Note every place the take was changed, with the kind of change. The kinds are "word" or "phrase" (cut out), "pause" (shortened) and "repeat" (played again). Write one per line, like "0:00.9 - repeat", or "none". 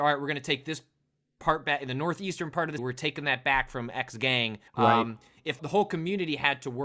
0:02.8 - word
0:04.7 - pause
0:05.6 - word